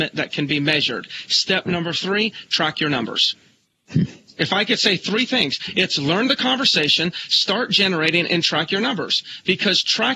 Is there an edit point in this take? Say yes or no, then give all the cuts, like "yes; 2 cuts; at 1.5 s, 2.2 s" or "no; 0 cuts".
no; 0 cuts